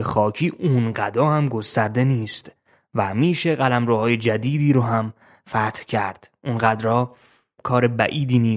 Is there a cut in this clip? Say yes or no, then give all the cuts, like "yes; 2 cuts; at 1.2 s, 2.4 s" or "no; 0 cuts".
no; 0 cuts